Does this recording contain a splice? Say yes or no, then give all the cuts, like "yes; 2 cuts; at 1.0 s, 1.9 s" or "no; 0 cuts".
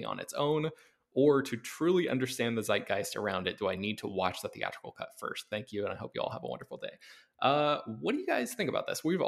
no; 0 cuts